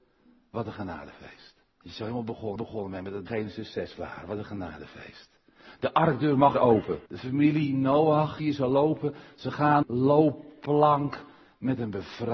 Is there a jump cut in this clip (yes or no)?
yes